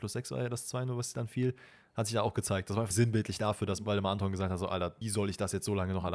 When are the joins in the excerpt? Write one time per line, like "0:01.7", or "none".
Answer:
0:02.9
0:05.0